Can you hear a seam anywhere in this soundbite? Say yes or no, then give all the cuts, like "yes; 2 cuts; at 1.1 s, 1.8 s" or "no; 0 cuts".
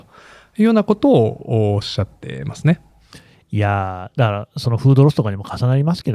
no; 0 cuts